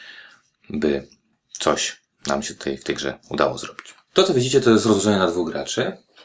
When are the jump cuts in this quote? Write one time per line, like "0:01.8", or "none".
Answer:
none